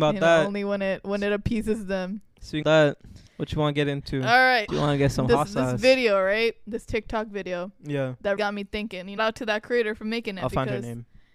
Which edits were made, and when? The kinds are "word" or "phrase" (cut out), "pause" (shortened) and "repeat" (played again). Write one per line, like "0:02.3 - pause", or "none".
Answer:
0:02.6 - word
0:03.3 - pause
0:04.7 - word
0:08.4 - word
0:09.2 - phrase